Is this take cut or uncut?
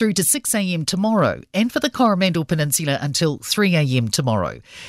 uncut